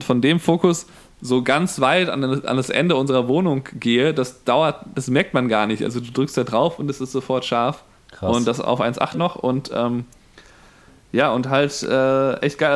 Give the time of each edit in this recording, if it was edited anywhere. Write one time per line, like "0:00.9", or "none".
0:08.0
0:09.1